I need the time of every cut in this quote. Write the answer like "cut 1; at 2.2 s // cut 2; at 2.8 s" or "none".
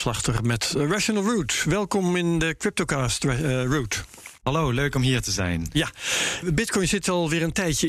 cut 1; at 4.4 s // cut 2; at 6.4 s